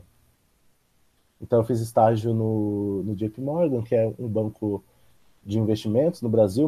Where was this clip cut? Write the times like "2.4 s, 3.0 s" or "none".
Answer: none